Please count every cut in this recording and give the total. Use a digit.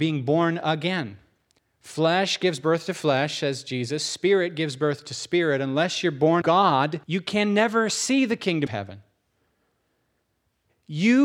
4